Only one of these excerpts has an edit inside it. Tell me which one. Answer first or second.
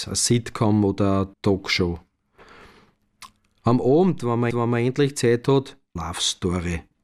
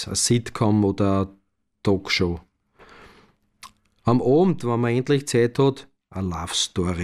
first